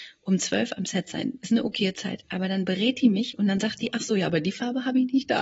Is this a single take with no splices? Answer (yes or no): yes